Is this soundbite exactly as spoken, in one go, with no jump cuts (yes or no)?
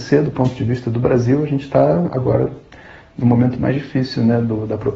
yes